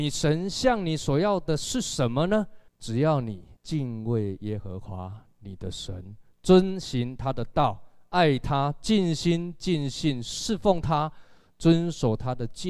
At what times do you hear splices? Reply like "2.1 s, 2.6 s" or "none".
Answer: 2.7 s, 3.6 s